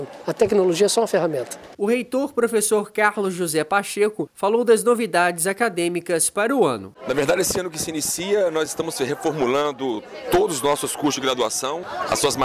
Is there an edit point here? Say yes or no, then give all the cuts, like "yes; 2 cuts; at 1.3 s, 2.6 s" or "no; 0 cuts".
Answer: no; 0 cuts